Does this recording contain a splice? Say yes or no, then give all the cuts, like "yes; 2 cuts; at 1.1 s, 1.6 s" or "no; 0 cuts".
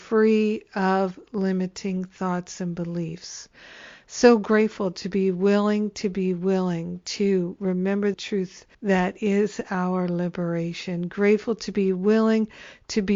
yes; 2 cuts; at 8.1 s, 8.7 s